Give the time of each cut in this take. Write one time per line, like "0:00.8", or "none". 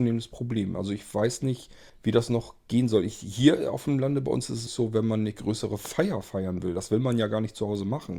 0:01.9
0:04.7